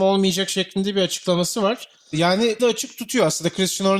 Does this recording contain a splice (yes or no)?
yes